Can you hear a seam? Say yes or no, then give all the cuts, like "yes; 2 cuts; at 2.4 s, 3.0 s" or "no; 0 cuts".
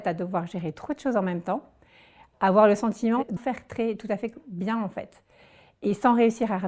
yes; 1 cut; at 3.4 s